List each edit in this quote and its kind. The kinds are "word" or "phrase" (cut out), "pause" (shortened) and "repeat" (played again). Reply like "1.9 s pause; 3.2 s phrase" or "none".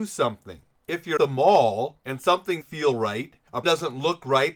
1.2 s word; 2.6 s word; 3.6 s word